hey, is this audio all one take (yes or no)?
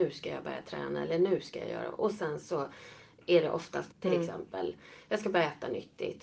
no